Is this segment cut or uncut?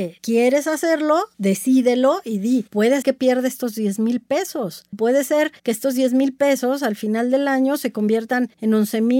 cut